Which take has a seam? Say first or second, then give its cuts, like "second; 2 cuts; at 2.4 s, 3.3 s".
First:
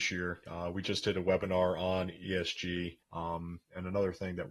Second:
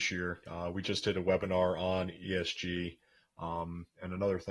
first; 1 cut; at 3.0 s